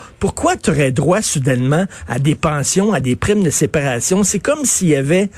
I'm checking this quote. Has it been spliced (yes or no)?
no